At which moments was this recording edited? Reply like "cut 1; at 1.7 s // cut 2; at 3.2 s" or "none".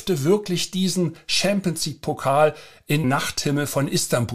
cut 1; at 3.0 s